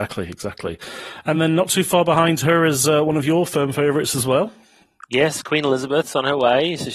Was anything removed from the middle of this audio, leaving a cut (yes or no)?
no